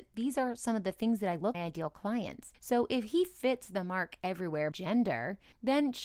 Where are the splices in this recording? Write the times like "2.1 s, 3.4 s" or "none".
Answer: 1.5 s, 4.7 s

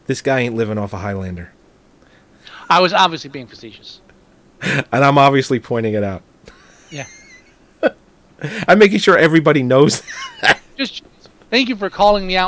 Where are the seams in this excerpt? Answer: none

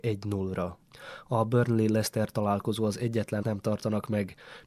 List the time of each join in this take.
3.4 s

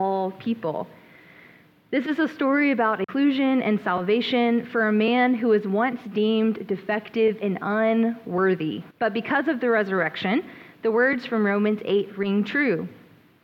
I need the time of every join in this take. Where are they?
8.9 s

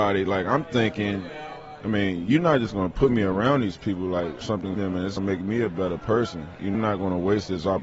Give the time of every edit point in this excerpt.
4.4 s, 4.8 s, 5.2 s, 6.7 s

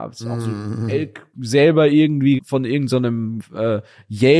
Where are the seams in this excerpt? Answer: 1.3 s, 2.4 s

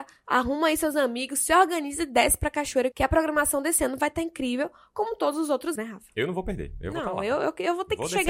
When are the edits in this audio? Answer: 2.9 s, 5.7 s

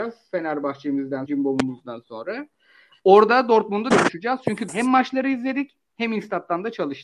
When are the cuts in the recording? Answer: 1.3 s, 3.9 s, 4.7 s

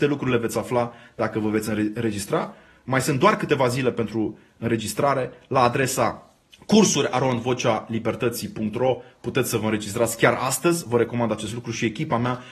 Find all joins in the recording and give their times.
6.4 s

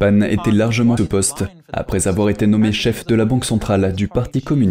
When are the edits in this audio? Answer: 1.0 s

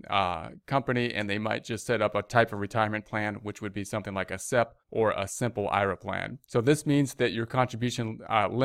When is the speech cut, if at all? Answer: 4.8 s, 6.4 s

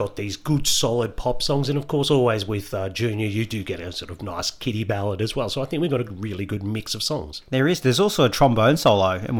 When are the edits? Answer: none

